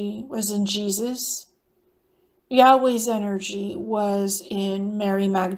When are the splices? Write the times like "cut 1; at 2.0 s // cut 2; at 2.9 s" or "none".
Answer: none